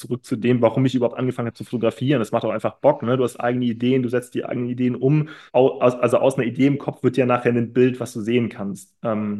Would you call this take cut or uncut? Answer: cut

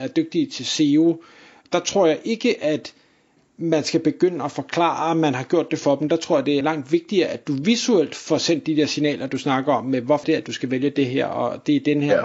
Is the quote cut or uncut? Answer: cut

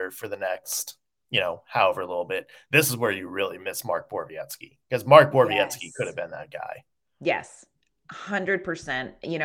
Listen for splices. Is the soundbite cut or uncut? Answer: uncut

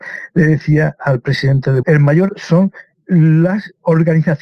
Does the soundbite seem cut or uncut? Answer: cut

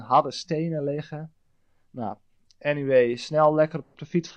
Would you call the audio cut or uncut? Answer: uncut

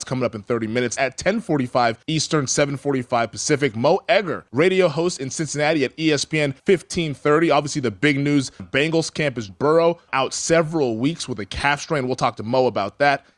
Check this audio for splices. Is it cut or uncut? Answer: cut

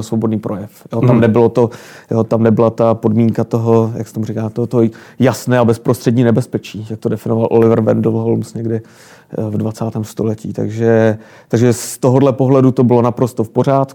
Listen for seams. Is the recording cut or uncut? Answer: uncut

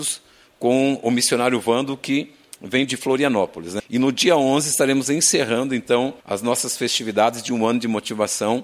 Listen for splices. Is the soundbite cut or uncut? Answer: cut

